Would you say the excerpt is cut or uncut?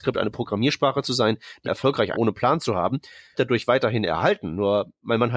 cut